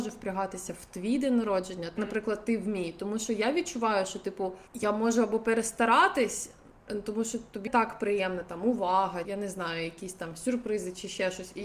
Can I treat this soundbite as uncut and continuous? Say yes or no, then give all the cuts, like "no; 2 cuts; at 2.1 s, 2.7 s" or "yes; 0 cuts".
no; 4 cuts; at 2.0 s, 4.7 s, 7.7 s, 9.2 s